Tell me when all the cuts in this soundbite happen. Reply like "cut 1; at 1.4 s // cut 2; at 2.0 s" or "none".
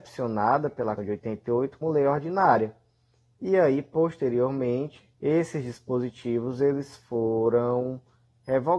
cut 1; at 1.0 s // cut 2; at 1.8 s // cut 3; at 5.1 s